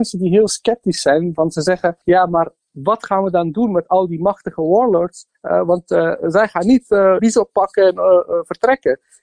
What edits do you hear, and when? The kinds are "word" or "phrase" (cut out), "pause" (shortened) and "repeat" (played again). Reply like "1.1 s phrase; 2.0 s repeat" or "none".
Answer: 2.0 s pause; 5.3 s pause; 7.2 s word